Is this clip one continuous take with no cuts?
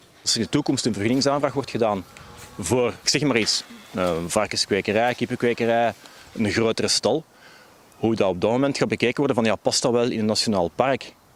no; 1 cut; at 3.0 s

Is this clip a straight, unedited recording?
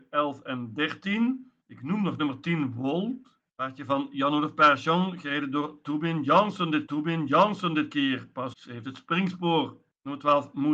no; 4 cuts; at 1.6 s, 3.5 s, 6.9 s, 8.5 s

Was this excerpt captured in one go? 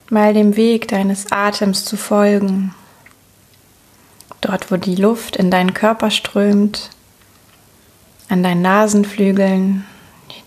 yes; 0 cuts

